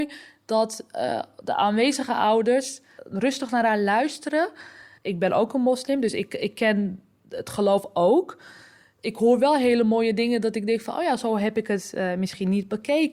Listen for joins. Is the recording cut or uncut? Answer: uncut